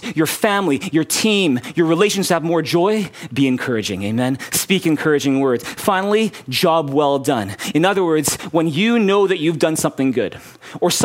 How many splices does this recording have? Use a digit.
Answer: 0